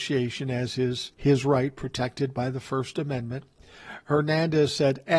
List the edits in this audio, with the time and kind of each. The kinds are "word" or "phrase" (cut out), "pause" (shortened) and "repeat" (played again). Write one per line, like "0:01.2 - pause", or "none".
0:01.1 - pause